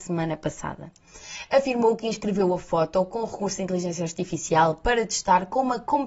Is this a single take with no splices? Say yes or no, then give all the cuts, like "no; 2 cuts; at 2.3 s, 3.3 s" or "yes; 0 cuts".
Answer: yes; 0 cuts